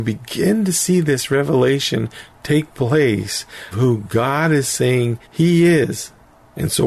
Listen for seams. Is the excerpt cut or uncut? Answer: cut